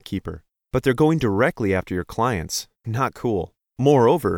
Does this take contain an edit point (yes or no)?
no